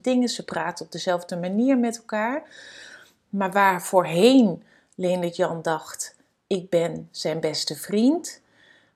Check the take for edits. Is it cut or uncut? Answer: uncut